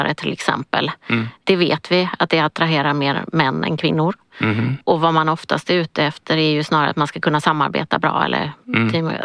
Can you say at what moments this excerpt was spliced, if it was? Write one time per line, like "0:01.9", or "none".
none